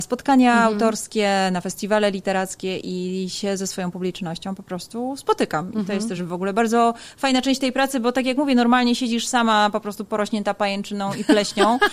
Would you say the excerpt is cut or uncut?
uncut